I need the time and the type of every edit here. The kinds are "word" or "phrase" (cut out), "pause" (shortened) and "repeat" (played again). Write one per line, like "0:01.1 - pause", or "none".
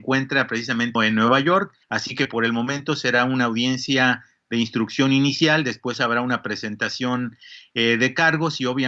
0:01.0 - word
0:01.8 - pause